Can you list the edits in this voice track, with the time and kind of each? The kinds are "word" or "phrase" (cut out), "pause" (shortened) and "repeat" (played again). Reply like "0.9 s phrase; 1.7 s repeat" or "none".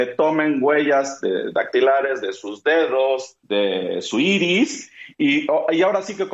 3.4 s pause